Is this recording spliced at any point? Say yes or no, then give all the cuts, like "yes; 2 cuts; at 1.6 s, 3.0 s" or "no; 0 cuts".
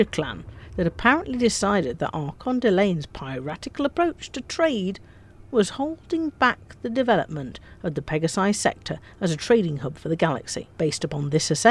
yes; 1 cut; at 10.7 s